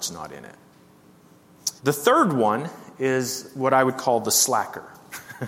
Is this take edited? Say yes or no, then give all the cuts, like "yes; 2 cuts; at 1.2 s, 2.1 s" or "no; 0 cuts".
yes; 1 cut; at 1.8 s